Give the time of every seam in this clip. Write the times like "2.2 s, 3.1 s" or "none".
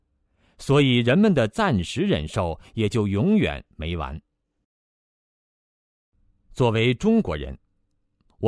none